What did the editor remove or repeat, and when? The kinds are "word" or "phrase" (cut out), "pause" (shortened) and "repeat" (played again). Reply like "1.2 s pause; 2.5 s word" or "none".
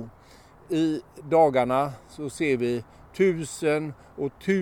none